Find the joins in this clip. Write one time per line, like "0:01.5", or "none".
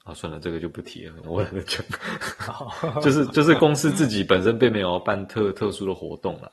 0:01.2